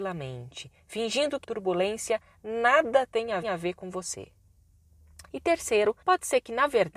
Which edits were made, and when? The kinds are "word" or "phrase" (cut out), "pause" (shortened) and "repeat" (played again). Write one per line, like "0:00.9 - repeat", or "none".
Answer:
0:01.4 - word
0:03.4 - repeat
0:05.3 - pause
0:06.0 - pause